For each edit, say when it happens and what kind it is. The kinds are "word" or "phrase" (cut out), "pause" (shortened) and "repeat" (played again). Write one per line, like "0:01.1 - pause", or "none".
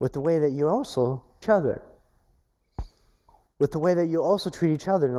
0:01.4 - phrase